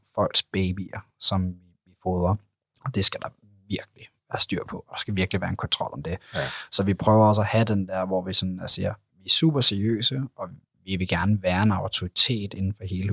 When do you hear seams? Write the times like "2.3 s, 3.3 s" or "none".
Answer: none